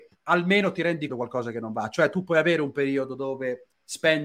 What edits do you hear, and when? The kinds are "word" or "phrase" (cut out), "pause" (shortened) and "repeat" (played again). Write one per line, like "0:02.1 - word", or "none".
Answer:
0:01.1 - phrase